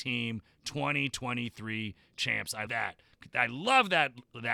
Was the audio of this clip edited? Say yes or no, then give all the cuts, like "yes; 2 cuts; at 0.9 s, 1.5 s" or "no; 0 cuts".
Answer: yes; 1 cut; at 2.7 s